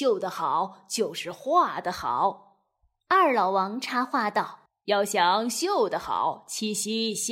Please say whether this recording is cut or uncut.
cut